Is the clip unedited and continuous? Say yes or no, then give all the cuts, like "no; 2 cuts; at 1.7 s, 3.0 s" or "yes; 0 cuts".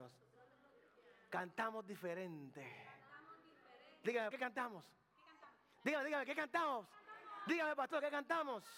no; 1 cut; at 4.3 s